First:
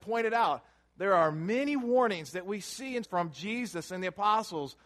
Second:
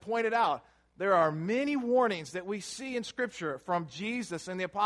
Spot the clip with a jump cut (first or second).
first